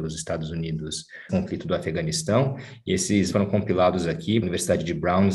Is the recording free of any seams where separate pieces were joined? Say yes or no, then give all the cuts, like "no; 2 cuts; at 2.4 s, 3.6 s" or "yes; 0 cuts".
no; 3 cuts; at 1.3 s, 3.3 s, 4.4 s